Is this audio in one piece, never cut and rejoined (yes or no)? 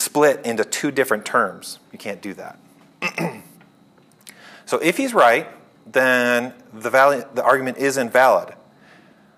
yes